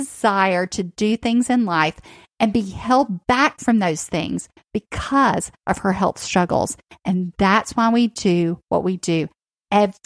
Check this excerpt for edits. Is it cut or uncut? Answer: uncut